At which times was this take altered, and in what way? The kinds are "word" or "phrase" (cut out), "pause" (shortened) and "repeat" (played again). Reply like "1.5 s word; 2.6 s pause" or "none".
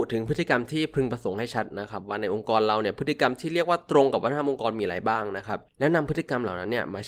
5.7 s pause